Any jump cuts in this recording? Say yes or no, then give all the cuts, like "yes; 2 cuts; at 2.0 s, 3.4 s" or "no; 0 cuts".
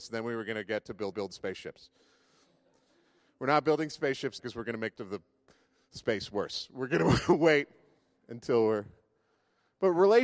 yes; 3 cuts; at 1.1 s, 4.4 s, 5.0 s